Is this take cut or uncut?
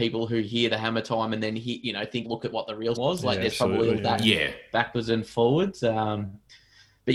cut